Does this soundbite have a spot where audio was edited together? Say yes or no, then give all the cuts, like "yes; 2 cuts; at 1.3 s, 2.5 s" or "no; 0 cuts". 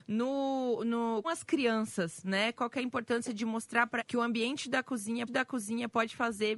yes; 3 cuts; at 1.2 s, 4.0 s, 5.3 s